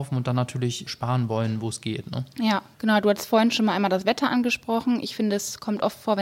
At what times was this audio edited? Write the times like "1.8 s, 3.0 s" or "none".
2.7 s